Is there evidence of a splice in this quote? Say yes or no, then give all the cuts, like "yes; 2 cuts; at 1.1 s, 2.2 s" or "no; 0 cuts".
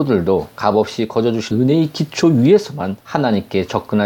yes; 2 cuts; at 1.5 s, 3.0 s